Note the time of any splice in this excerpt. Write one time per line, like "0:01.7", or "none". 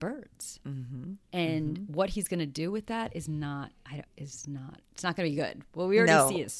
0:01.2
0:04.1
0:04.8